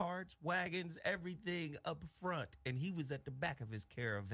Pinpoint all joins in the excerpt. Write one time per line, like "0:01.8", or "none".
none